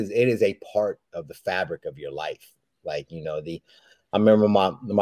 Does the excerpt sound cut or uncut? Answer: uncut